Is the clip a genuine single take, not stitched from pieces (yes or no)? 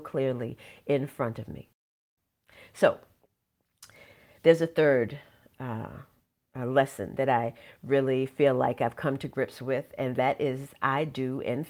yes